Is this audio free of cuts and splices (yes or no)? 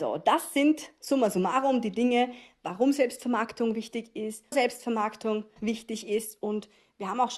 no